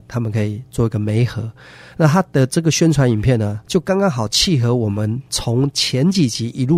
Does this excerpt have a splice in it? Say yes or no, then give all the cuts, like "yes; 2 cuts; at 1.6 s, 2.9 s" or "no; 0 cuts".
yes; 1 cut; at 3.6 s